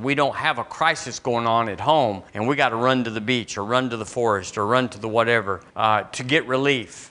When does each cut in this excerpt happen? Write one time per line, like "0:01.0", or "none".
0:02.3
0:05.7